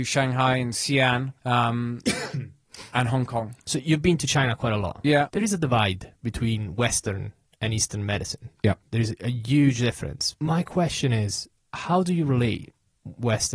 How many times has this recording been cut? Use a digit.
2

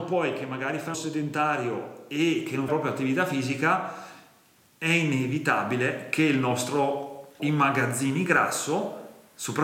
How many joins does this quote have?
3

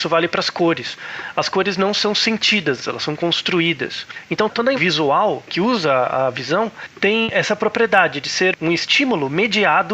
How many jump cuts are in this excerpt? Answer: 1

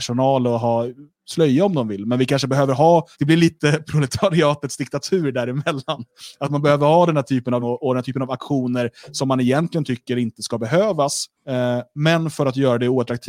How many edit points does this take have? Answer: 3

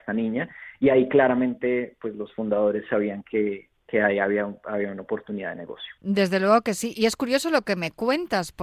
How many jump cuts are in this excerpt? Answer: 1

